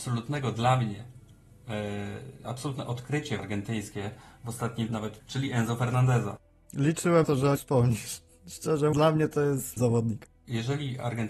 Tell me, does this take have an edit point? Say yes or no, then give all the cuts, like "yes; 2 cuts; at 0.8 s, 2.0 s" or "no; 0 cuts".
yes; 8 cuts; at 2.4 s, 3.4 s, 4.9 s, 5.2 s, 7.2 s, 7.6 s, 8.9 s, 9.8 s